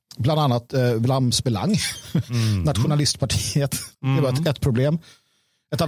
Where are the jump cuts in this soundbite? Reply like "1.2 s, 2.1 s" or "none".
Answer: 3.9 s